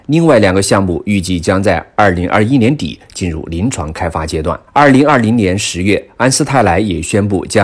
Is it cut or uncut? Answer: cut